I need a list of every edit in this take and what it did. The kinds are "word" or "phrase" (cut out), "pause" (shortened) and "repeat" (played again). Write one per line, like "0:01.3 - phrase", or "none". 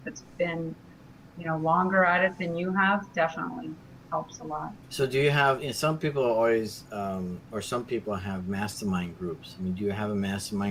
0:04.8 - pause

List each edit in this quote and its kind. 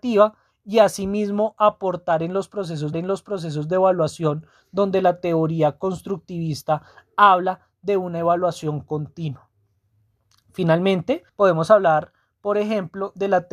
0:02.9 - repeat
0:11.3 - pause

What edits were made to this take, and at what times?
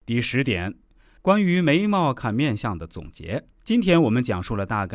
0:03.5 - pause

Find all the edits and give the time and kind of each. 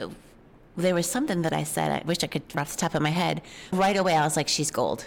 0:02.5 - word
0:03.7 - word

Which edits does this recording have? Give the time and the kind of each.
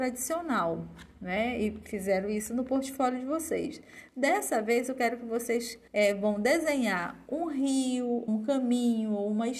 0:05.9 - pause
0:08.3 - word

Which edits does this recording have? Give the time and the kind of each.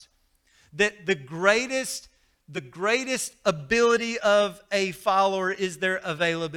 none

